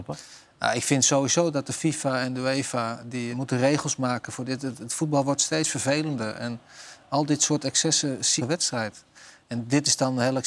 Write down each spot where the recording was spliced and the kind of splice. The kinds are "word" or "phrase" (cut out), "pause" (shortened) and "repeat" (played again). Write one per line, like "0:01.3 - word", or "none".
0:03.3 - word
0:08.4 - phrase